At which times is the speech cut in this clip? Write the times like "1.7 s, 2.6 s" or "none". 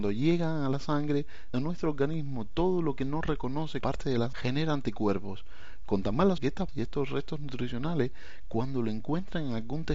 1.5 s, 3.8 s, 4.3 s, 6.4 s, 6.7 s